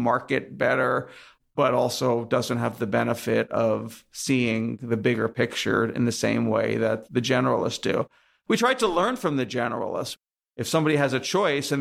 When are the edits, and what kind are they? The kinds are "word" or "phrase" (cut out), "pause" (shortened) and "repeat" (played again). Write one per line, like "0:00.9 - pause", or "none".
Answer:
none